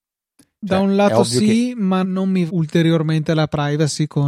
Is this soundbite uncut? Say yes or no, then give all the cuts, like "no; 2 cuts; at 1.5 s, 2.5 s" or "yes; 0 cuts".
no; 2 cuts; at 2.0 s, 2.5 s